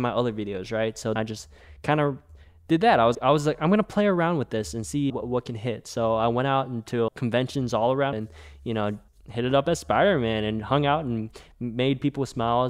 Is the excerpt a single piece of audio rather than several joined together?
no; 6 cuts; at 1.2 s, 3.1 s, 5.1 s, 7.1 s, 8.1 s, 9.1 s

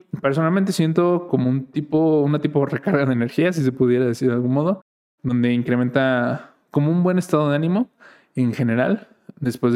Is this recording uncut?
yes; 0 cuts

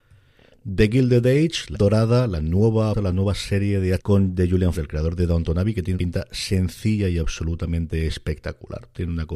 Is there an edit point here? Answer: yes; 5 cuts; at 1.7 s, 2.9 s, 4.0 s, 4.7 s, 5.9 s

